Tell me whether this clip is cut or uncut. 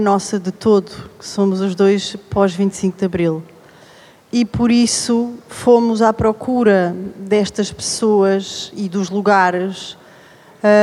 uncut